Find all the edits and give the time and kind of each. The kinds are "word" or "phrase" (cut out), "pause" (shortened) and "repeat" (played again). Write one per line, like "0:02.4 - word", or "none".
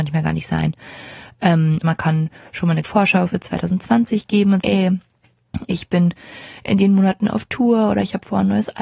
0:01.8 - word
0:02.8 - word
0:04.6 - word